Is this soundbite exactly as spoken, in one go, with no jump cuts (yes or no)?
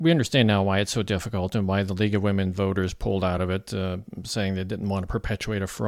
yes